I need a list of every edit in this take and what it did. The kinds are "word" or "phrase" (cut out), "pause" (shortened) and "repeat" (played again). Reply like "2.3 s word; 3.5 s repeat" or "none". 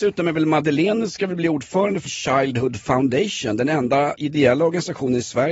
2.1 s word; 4.2 s word